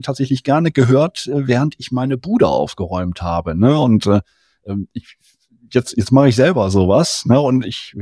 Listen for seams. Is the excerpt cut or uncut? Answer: uncut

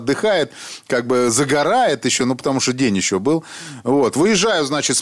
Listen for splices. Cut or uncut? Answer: uncut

